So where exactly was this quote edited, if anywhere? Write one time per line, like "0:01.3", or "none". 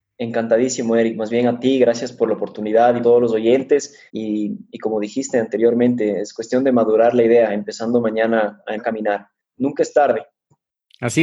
0:03.0
0:04.1
0:08.8